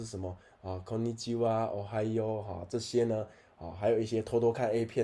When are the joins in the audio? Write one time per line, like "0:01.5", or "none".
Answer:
none